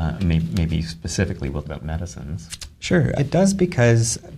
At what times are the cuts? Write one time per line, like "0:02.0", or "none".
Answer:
0:01.6
0:03.2